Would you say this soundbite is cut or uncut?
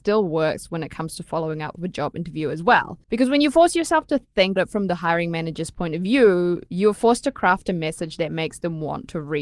cut